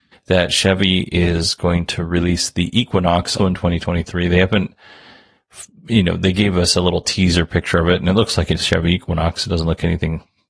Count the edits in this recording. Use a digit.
1